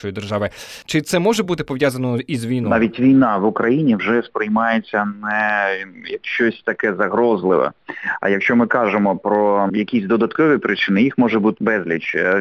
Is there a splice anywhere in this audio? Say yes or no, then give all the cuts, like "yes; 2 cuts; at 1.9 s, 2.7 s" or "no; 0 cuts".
no; 0 cuts